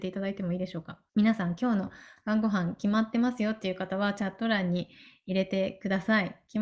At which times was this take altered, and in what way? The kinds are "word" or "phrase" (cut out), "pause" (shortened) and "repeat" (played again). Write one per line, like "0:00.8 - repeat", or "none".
0:01.1 - pause